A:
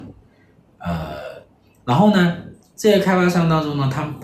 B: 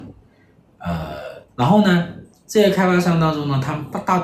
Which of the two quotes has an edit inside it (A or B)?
B